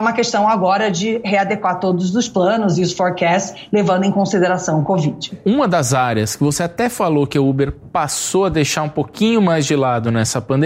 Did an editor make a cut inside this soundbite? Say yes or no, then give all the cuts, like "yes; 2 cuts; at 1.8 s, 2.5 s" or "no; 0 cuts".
no; 0 cuts